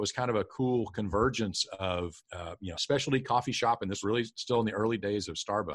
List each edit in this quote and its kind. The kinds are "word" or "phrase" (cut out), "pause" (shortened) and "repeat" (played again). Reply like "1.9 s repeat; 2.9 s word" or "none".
2.2 s pause; 2.7 s phrase; 4.0 s word